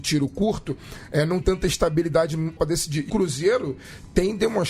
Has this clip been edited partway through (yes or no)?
yes